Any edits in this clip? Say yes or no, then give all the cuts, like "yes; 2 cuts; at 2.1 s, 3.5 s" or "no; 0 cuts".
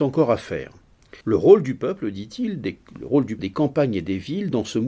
yes; 2 cuts; at 1.2 s, 3.4 s